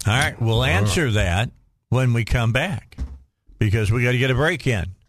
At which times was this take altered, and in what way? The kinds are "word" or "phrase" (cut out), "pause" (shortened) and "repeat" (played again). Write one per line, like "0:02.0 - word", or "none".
none